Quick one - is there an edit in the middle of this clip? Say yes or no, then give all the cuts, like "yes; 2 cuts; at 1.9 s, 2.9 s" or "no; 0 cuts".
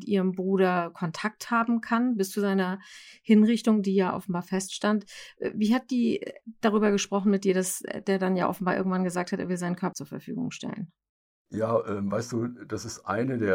yes; 2 cuts; at 9.9 s, 11.1 s